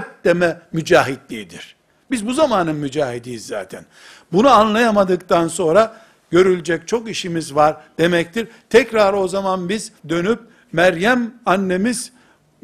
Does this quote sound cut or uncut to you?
cut